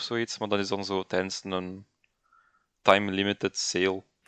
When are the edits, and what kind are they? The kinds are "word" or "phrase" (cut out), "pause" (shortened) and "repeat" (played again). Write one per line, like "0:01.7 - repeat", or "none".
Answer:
none

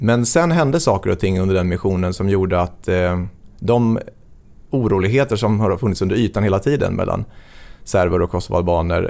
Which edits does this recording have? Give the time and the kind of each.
none

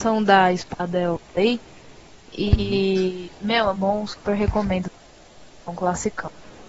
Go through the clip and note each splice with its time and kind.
0:01.2 - pause
0:03.7 - word

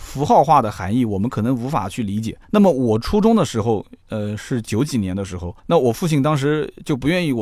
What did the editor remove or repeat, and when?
0:02.4 - pause
0:05.6 - pause

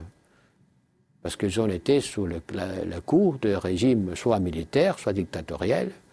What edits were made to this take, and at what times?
none

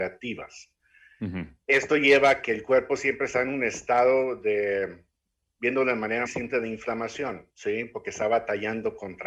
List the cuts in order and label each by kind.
0:01.6 - pause
0:06.3 - word
0:07.5 - pause

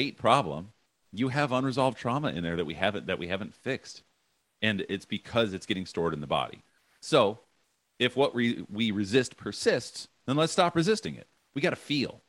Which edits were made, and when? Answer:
none

